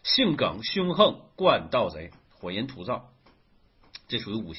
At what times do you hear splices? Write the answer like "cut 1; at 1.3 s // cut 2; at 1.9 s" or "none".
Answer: none